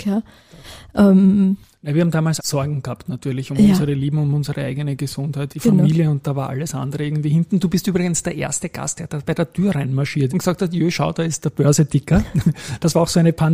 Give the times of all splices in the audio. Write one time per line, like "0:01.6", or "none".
0:02.4
0:05.5
0:10.3